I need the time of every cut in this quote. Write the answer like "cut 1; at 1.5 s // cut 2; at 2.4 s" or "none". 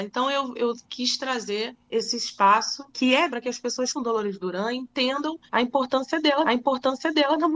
cut 1; at 1.8 s // cut 2; at 2.9 s // cut 3; at 3.3 s // cut 4; at 3.9 s // cut 5; at 5.5 s // cut 6; at 6.4 s